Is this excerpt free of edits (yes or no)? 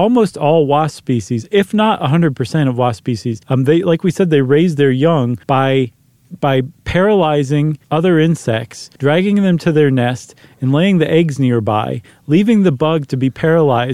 no